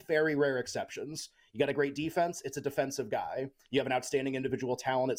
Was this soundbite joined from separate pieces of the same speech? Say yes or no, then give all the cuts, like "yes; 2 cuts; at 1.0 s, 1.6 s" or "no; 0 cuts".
no; 0 cuts